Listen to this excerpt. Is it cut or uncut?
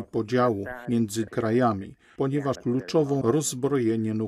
cut